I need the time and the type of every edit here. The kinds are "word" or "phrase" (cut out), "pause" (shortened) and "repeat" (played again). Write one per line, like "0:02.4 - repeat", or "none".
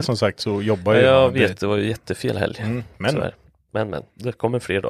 none